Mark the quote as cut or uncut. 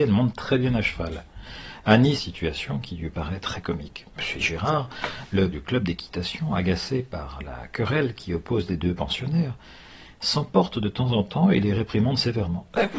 cut